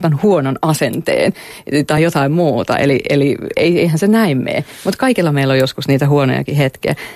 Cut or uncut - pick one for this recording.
uncut